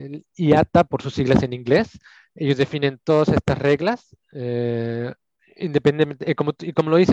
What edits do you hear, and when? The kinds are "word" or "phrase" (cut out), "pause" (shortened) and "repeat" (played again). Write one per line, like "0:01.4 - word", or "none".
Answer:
none